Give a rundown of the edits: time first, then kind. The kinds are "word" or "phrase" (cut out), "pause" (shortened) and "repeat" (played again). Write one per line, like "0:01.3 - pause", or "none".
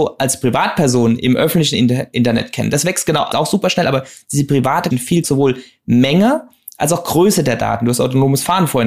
0:03.3 - word
0:04.9 - word
0:05.2 - word